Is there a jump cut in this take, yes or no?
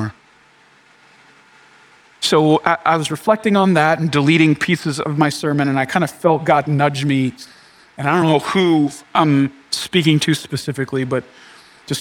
no